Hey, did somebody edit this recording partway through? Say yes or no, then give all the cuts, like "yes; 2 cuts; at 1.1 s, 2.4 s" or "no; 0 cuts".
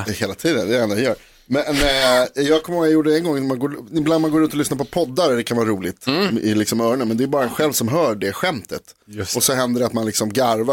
no; 0 cuts